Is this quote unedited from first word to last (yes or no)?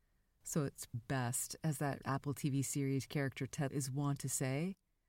no